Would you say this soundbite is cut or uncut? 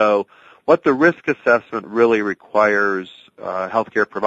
uncut